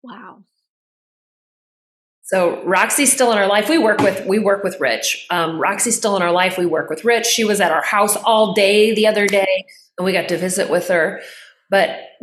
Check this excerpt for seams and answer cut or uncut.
uncut